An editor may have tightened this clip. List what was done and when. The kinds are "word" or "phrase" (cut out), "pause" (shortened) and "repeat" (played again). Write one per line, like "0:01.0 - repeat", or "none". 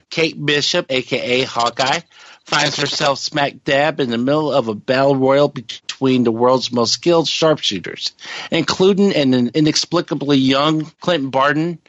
none